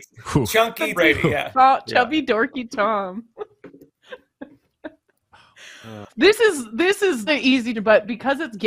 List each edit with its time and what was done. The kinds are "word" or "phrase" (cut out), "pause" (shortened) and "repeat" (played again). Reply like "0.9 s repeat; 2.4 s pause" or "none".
1.0 s word; 1.5 s word; 6.1 s word; 7.3 s word; 7.7 s word